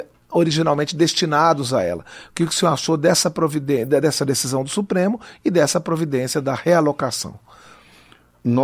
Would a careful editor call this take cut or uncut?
uncut